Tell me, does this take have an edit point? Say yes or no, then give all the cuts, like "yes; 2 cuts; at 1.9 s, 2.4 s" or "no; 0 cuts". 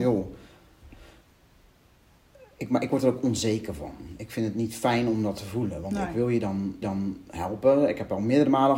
yes; 1 cut; at 6.8 s